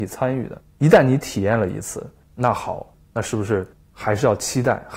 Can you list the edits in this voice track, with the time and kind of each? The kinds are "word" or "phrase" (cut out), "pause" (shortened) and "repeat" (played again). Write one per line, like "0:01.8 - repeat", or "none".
none